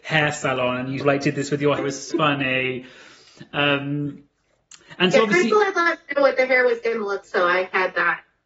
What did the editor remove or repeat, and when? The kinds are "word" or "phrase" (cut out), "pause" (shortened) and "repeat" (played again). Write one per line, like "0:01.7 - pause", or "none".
0:01.0 - word
0:01.8 - word
0:02.1 - word
0:07.2 - word